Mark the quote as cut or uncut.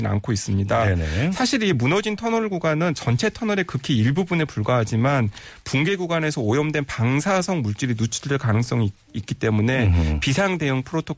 uncut